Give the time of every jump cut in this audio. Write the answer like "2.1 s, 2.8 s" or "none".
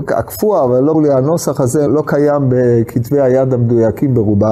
0.9 s, 1.9 s